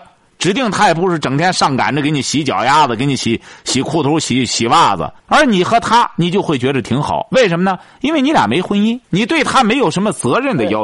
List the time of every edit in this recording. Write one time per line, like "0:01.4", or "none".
0:05.2
0:09.0